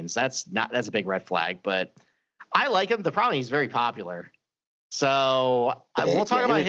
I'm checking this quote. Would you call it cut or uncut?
uncut